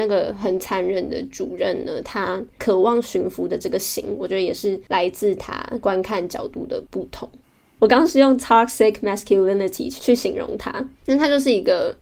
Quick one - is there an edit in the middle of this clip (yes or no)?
no